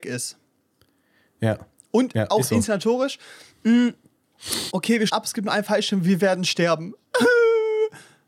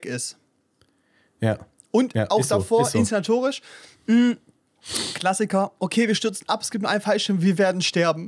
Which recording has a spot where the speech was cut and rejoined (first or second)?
first